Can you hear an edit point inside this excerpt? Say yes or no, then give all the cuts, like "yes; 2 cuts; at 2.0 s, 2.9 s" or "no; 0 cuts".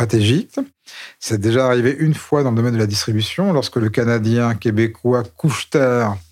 no; 0 cuts